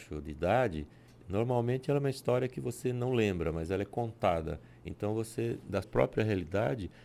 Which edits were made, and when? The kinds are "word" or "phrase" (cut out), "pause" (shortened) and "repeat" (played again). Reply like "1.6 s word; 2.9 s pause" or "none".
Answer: 5.8 s word

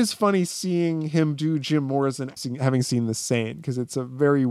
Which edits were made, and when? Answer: 2.4 s word

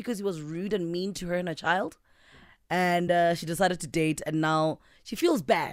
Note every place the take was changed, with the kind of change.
none

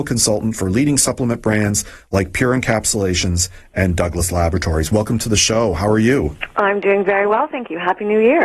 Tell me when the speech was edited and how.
none

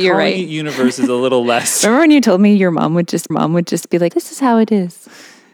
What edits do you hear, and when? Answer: 3.3 s repeat; 4.1 s word

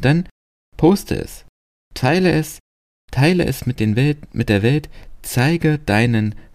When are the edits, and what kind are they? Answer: none

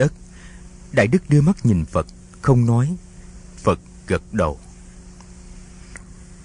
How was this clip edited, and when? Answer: none

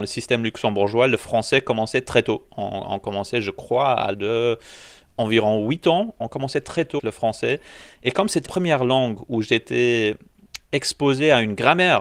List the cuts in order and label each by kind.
4.1 s word; 7.0 s word; 8.4 s word

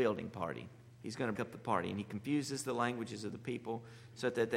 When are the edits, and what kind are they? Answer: 0.9 s pause; 1.3 s word

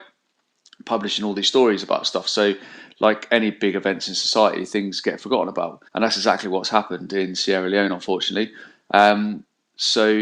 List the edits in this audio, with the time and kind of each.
5.9 s pause

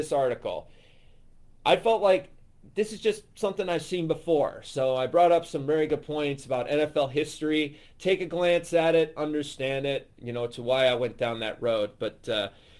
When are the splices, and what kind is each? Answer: none

